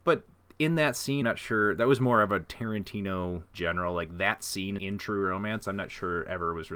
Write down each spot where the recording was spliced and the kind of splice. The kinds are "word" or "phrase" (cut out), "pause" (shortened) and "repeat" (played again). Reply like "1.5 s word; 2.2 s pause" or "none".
1.2 s word; 3.5 s phrase; 4.8 s word